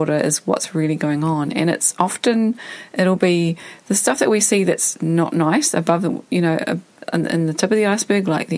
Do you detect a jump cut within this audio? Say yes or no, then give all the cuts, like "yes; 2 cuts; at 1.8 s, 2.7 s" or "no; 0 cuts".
no; 0 cuts